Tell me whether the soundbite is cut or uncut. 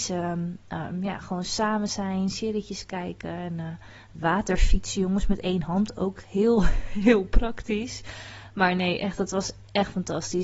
uncut